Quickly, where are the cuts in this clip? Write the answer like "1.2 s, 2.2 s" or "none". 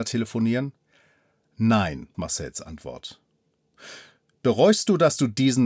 2.1 s

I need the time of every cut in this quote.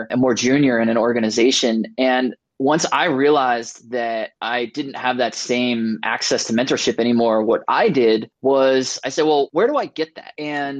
none

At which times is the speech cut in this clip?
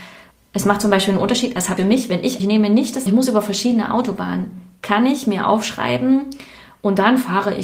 1.8 s, 2.4 s, 3.1 s

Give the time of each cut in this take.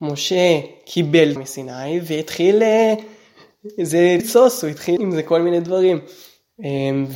1.4 s, 4.2 s, 5.0 s

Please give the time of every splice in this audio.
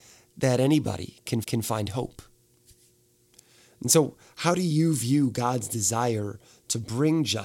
1.4 s

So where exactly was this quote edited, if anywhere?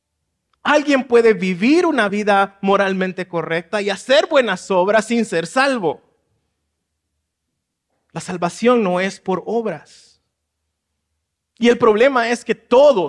none

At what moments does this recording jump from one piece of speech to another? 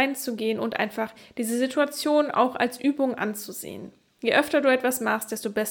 none

